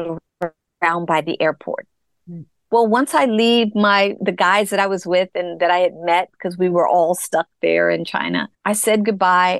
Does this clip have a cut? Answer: yes; 2 cuts; at 4.2 s, 8.5 s

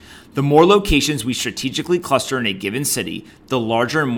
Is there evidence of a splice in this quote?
no; 0 cuts

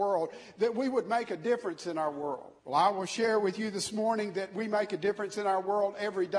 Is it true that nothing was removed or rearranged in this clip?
no; 1 cut; at 2.6 s

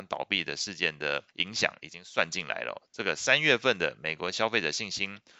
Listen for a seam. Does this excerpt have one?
yes; 1 cut; at 1.3 s

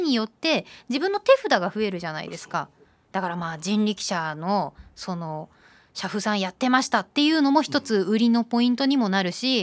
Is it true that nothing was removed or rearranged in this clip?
yes; 0 cuts

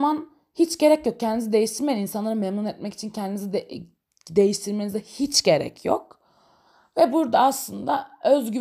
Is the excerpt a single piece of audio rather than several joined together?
yes; 0 cuts

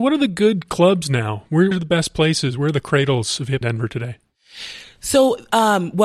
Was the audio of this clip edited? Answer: yes; 2 cuts; at 1.7 s, 3.6 s

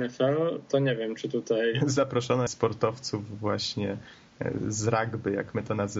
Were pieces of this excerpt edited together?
yes; 1 cut; at 2.5 s

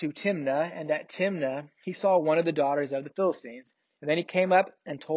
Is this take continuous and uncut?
yes; 0 cuts

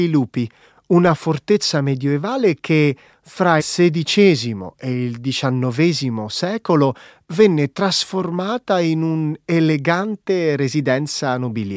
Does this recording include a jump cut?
yes; 1 cut; at 3.6 s

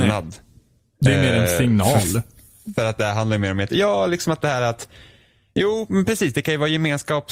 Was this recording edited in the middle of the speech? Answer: no; 0 cuts

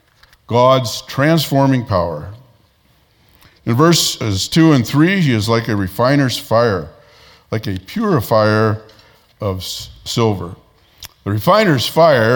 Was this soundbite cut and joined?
no; 0 cuts

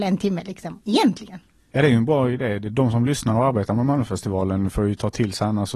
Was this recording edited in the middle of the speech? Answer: no; 0 cuts

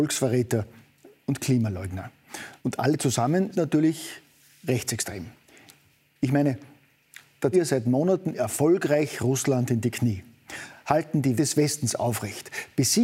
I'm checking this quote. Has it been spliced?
yes; 4 cuts; at 2.6 s, 3.5 s, 7.5 s, 11.4 s

